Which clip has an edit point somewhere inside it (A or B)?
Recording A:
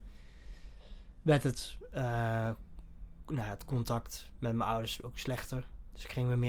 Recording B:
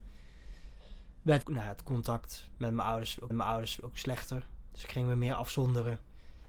B